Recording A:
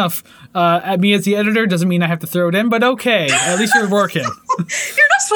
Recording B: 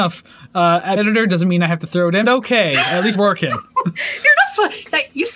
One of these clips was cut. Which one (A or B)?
B